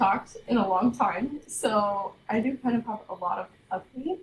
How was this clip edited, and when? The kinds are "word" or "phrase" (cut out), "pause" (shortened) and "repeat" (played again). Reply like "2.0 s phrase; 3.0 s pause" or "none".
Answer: none